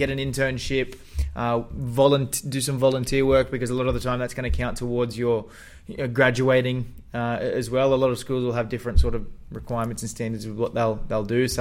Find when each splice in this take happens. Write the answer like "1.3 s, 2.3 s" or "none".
none